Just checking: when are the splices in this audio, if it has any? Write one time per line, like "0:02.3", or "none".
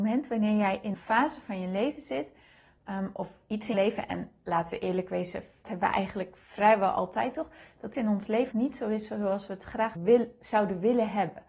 0:00.9
0:03.7
0:05.6
0:07.9
0:08.5
0:10.0

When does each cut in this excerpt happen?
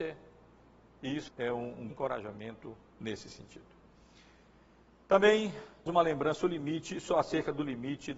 0:01.3
0:01.9
0:05.9

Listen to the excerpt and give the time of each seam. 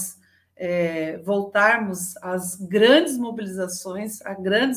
none

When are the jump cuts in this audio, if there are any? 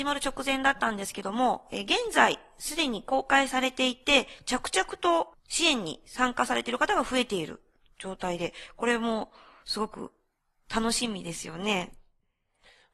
none

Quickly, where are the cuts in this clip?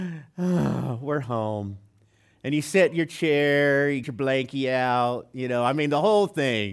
0:04.0

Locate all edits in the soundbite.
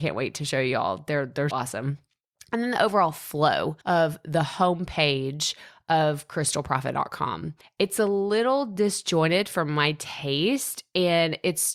0:01.5
0:03.8
0:07.6

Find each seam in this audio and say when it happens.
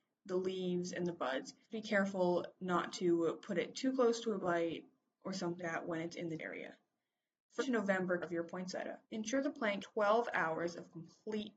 0:01.7
0:04.4
0:05.6
0:06.4
0:07.6
0:08.2
0:09.0
0:09.8

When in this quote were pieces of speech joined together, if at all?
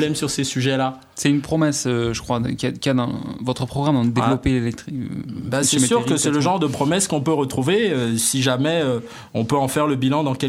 none

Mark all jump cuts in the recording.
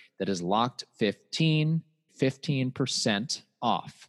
0:02.1

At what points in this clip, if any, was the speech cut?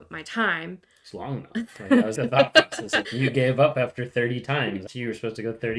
0:01.1
0:02.2
0:03.0
0:04.9

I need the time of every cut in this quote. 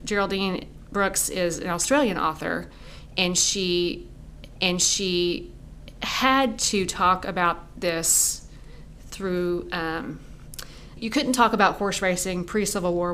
0:04.5
0:11.0

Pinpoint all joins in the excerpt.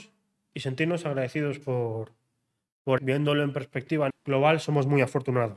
0:03.0
0:04.1

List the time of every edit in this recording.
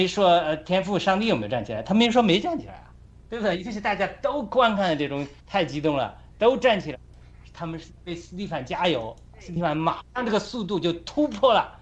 0:03.1
0:05.4

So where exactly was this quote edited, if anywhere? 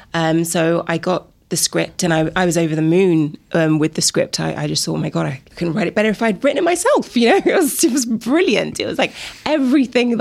0:05.5

